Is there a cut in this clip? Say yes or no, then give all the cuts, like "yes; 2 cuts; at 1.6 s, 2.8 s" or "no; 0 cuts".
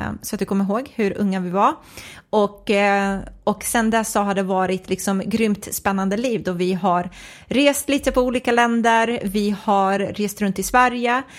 no; 0 cuts